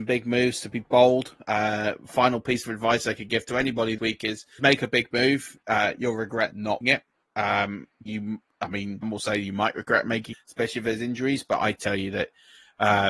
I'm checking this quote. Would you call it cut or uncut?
cut